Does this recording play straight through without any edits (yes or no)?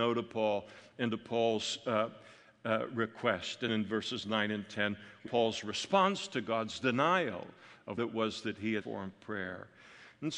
no